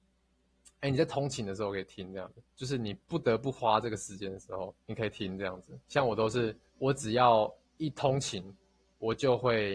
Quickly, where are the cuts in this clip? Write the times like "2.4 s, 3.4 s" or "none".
2.5 s, 4.8 s, 5.8 s, 6.7 s, 7.6 s